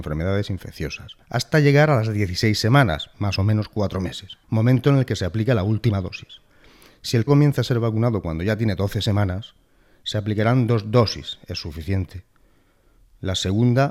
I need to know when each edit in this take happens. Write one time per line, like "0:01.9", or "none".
0:01.2
0:04.4
0:07.3